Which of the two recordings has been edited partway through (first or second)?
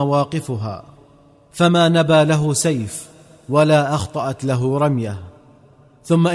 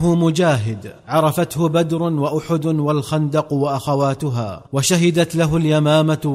second